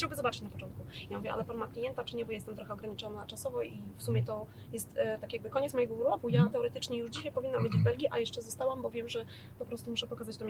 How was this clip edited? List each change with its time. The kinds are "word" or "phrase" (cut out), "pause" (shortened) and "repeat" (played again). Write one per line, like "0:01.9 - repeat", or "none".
none